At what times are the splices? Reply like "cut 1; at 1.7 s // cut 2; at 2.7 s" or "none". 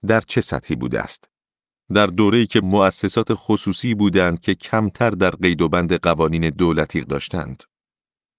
cut 1; at 2.6 s // cut 2; at 7.0 s